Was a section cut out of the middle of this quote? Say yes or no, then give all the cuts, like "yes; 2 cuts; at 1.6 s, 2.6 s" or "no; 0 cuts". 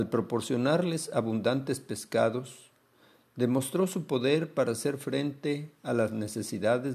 no; 0 cuts